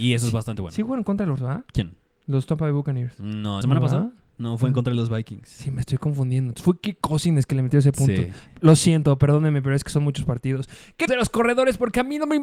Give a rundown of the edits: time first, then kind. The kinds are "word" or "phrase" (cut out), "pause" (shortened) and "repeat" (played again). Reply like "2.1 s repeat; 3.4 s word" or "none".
1.4 s word; 1.7 s pause; 3.6 s word; 11.1 s phrase